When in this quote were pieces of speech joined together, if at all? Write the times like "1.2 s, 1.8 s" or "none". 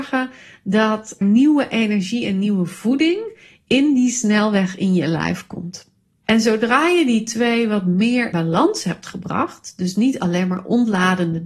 1.2 s, 8.3 s